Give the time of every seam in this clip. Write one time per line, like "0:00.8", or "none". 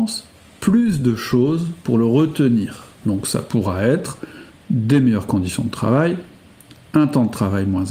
none